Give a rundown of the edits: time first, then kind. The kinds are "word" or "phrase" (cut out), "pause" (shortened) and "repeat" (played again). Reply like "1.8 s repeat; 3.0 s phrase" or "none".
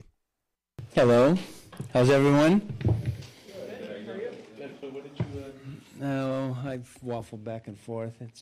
none